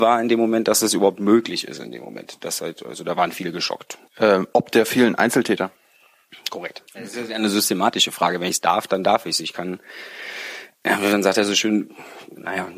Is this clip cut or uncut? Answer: cut